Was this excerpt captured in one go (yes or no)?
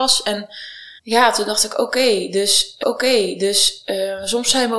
no